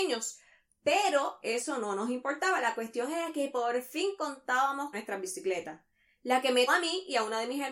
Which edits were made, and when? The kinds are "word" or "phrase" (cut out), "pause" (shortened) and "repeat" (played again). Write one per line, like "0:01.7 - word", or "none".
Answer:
0:04.9 - word
0:06.7 - word